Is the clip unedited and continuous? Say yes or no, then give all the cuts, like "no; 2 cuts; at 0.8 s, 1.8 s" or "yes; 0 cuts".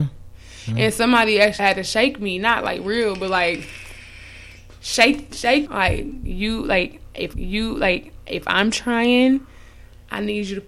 no; 3 cuts; at 1.6 s, 5.6 s, 7.3 s